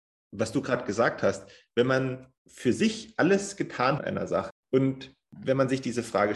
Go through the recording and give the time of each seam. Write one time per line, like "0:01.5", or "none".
0:02.4
0:04.0
0:04.5